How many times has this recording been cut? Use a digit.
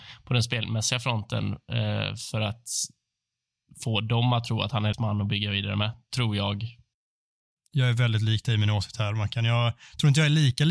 1